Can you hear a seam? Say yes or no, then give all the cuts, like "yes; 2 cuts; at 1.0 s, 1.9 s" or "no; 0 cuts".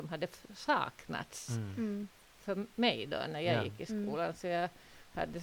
no; 0 cuts